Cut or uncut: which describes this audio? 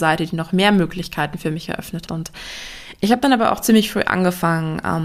cut